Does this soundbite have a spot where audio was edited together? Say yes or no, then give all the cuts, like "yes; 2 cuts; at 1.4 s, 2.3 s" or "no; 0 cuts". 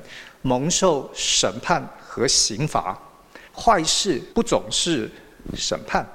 yes; 2 cuts; at 3.5 s, 4.3 s